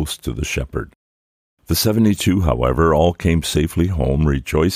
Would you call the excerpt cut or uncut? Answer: uncut